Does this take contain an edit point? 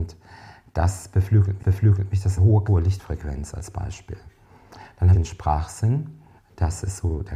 yes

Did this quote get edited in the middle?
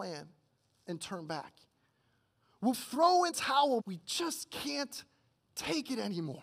yes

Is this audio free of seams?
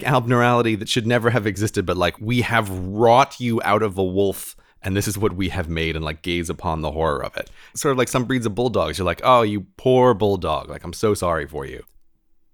yes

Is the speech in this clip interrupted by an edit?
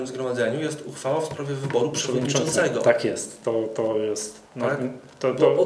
yes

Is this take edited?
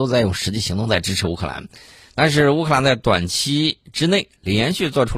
no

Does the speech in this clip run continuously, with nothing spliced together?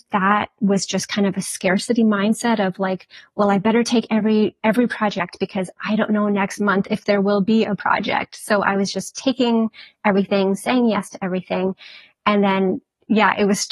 yes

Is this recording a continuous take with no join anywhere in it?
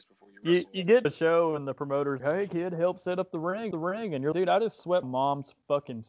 no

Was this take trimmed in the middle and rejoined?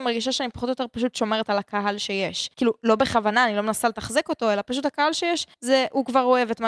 yes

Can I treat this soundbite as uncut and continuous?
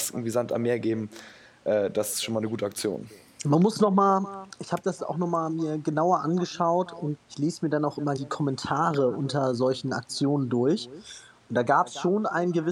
no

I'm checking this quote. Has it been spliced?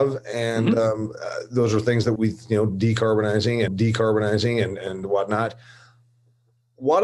yes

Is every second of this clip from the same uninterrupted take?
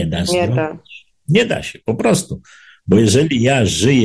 yes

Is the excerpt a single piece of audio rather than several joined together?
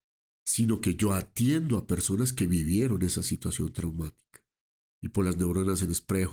yes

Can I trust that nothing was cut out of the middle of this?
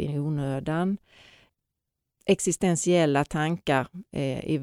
yes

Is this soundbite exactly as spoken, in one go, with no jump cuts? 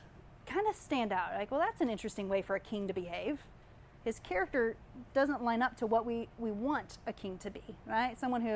yes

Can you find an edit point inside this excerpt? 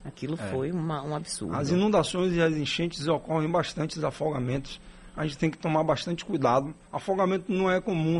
yes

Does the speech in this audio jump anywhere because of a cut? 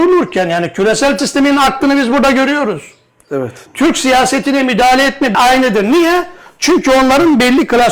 yes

